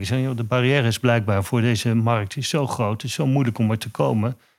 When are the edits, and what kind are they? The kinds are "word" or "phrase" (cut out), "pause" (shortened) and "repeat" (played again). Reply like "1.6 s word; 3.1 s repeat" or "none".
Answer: none